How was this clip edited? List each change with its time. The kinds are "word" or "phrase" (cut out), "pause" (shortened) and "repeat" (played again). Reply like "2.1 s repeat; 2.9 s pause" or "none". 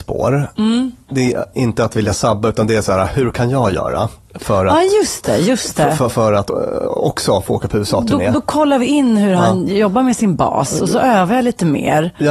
none